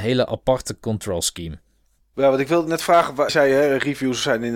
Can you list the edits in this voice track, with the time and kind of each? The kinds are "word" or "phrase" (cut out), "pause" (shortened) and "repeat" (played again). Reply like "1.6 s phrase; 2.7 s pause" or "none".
3.3 s word